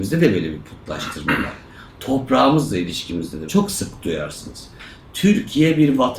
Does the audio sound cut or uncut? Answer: cut